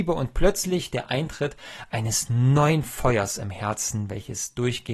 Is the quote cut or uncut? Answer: uncut